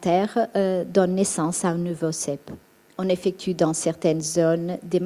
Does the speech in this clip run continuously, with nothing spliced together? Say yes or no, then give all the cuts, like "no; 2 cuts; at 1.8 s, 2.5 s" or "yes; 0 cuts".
yes; 0 cuts